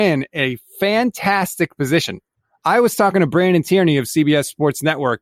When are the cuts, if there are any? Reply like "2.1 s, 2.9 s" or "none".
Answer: none